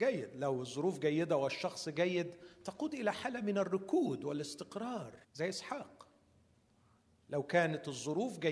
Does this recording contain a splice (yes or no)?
yes